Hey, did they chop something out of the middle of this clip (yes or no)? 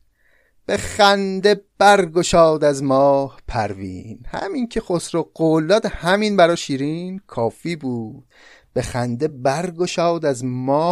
no